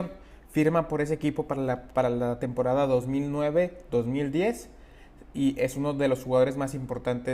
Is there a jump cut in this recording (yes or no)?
no